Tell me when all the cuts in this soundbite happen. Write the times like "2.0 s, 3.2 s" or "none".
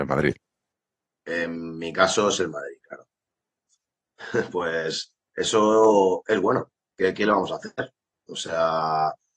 none